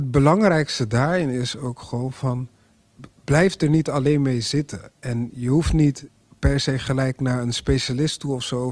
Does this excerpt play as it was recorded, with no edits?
yes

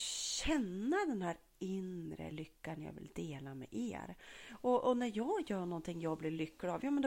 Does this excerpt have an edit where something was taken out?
no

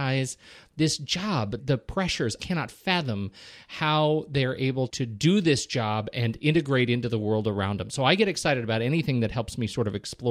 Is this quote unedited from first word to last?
no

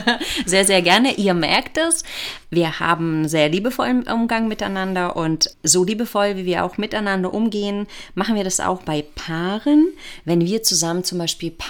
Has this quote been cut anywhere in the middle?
no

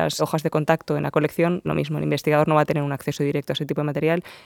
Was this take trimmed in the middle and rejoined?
yes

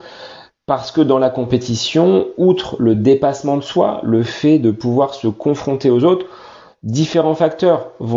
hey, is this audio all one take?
yes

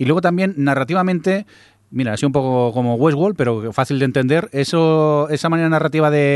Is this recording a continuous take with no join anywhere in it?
yes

